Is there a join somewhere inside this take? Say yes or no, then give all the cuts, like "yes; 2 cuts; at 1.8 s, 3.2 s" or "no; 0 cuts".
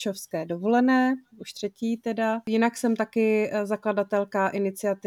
no; 0 cuts